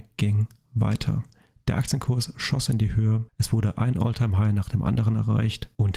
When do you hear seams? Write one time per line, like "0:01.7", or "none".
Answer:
none